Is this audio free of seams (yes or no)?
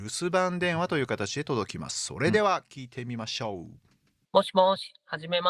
yes